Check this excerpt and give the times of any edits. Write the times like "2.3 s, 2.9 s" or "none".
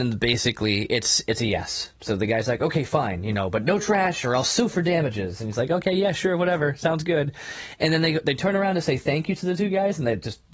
2.0 s